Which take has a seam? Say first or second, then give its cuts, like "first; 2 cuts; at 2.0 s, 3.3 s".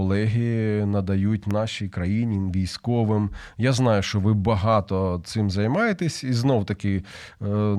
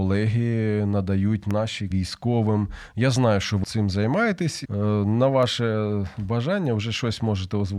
second; 3 cuts; at 1.9 s, 3.6 s, 4.6 s